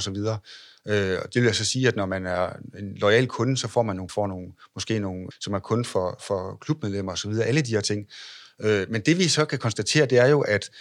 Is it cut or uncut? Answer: cut